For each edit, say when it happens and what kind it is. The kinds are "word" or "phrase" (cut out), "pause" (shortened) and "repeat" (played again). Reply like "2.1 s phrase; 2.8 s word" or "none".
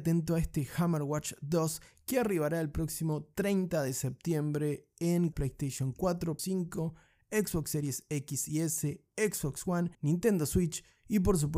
5.3 s word; 6.4 s word; 9.9 s pause